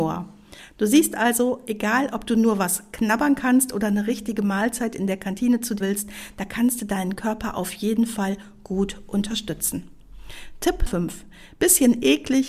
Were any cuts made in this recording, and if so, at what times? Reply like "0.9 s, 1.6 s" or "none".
5.8 s, 10.9 s